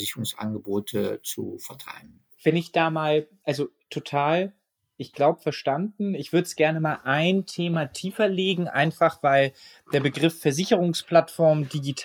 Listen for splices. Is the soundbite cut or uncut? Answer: uncut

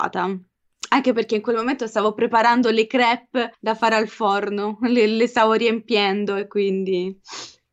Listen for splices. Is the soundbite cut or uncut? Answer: cut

